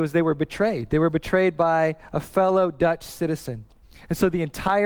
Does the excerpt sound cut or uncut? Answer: cut